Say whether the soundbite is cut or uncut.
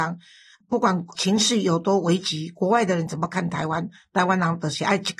uncut